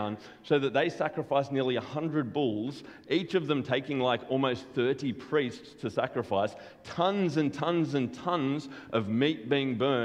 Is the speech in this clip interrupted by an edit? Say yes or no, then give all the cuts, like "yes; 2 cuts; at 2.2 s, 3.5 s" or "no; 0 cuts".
no; 0 cuts